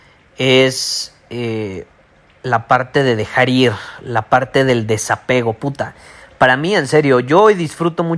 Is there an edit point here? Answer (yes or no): no